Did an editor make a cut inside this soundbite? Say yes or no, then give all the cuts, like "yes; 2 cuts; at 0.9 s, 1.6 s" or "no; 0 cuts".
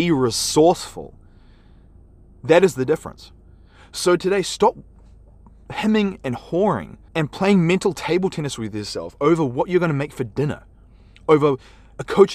yes; 1 cut; at 7.1 s